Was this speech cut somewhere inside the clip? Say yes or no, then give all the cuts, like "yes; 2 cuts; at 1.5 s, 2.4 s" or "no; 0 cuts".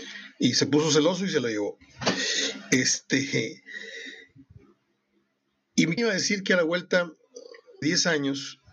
yes; 2 cuts; at 6.0 s, 7.8 s